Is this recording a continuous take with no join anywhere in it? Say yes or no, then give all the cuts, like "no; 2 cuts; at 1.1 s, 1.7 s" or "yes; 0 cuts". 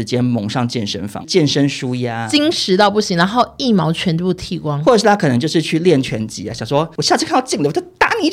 no; 1 cut; at 1.2 s